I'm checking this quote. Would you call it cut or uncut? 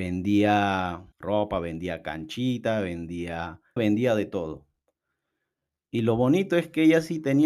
cut